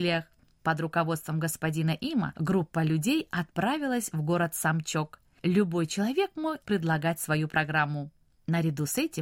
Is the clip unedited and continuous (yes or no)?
yes